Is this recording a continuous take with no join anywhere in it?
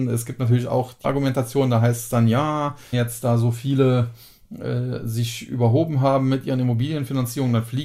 no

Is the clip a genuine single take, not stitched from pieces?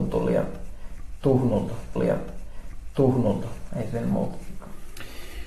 no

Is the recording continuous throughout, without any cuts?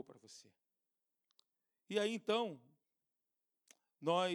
no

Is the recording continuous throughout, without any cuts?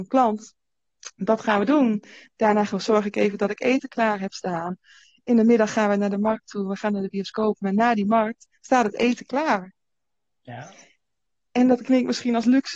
yes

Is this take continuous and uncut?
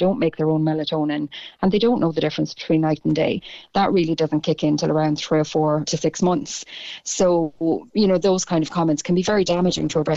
yes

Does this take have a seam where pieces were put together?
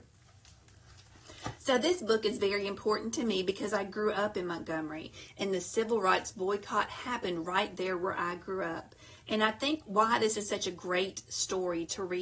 no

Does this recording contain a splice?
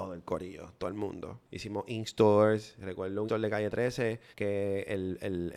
yes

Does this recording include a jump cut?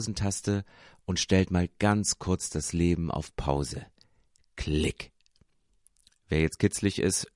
no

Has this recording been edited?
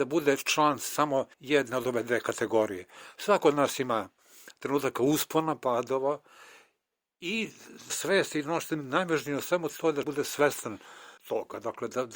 yes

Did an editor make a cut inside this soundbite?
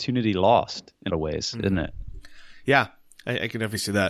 yes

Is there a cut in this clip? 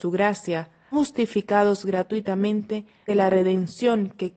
yes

